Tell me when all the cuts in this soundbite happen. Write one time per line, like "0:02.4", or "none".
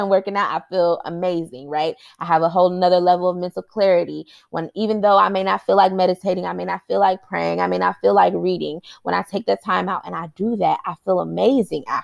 none